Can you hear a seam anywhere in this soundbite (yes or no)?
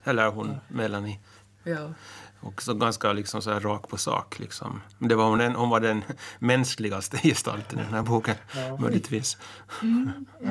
no